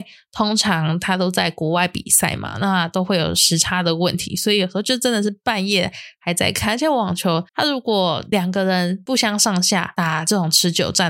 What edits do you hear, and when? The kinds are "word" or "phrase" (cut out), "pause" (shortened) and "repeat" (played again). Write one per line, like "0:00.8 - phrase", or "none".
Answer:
0:07.5 - pause